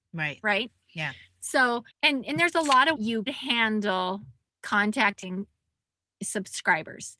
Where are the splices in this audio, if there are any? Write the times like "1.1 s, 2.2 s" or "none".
1.9 s, 3.0 s, 3.3 s, 4.5 s